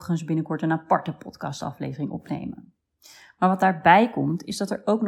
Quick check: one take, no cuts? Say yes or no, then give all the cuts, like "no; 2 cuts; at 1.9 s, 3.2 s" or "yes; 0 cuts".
no; 1 cut; at 2.9 s